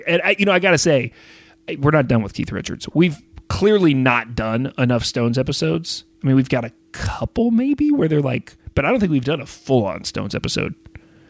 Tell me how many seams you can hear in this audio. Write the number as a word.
one